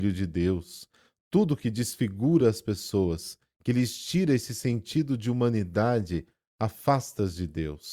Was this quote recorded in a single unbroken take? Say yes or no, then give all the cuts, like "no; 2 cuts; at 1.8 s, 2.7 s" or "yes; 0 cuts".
yes; 0 cuts